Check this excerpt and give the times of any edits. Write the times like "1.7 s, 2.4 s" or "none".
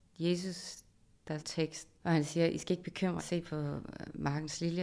1.4 s, 3.2 s